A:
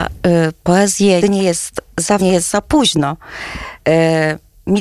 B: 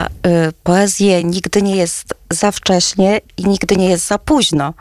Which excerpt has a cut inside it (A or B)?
A